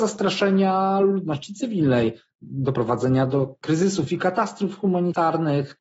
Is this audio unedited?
yes; 0 cuts

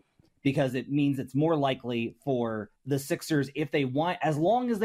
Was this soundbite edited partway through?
yes; 1 cut; at 2.8 s

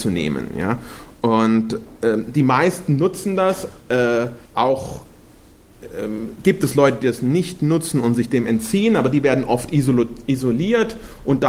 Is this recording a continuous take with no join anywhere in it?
no; 1 cut; at 4.4 s

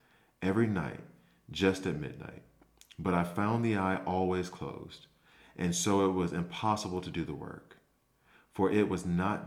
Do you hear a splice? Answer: no; 0 cuts

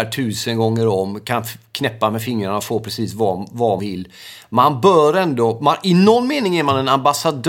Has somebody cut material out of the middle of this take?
yes; 1 cut; at 3.8 s

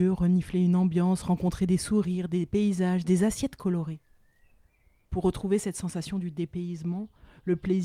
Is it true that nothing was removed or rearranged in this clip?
yes; 0 cuts

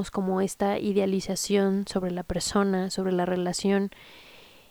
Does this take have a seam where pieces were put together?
no; 0 cuts

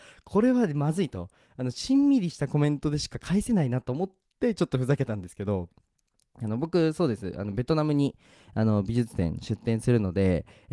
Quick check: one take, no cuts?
yes; 0 cuts

